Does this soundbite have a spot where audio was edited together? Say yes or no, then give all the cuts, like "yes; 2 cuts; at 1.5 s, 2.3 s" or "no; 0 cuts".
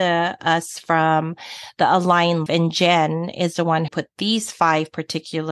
yes; 2 cuts; at 2.5 s, 3.9 s